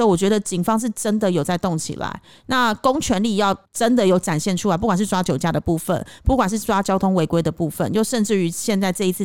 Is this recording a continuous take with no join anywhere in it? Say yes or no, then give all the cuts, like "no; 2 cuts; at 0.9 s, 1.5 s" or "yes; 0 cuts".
no; 1 cut; at 3.6 s